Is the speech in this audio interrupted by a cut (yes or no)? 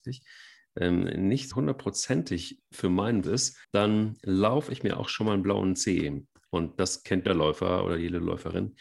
yes